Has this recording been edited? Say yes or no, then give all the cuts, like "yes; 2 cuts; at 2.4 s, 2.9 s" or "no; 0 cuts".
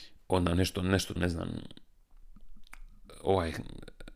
yes; 1 cut; at 1.2 s